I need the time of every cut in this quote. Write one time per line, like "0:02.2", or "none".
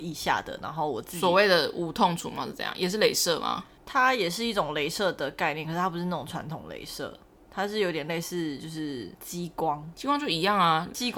0:09.1

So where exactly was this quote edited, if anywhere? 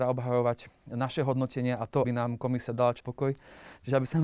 0:02.0
0:03.0

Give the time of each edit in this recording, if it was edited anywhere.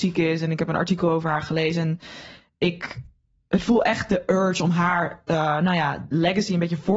none

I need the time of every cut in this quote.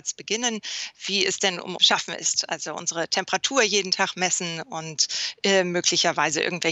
0:01.8

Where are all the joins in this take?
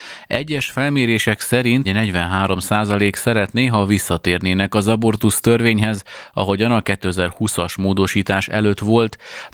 0:01.8

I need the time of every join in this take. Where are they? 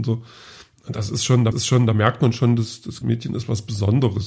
0:01.5
0:03.0

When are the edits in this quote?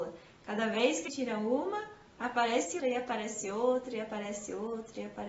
0:01.1
0:02.8

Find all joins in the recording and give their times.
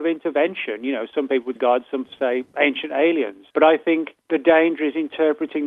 0:01.6
0:02.0
0:03.5
0:04.2

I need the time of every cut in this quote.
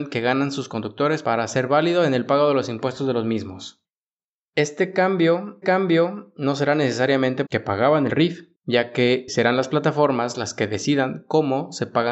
0:05.6
0:07.5
0:08.1
0:08.6
0:09.3

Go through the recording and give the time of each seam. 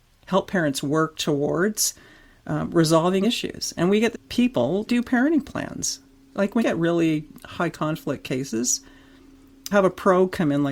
0:03.2
0:04.1
0:04.9
0:06.6
0:09.7

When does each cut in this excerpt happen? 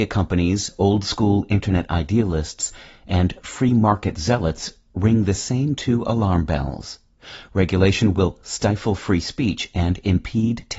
none

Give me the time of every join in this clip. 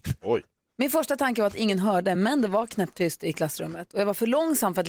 none

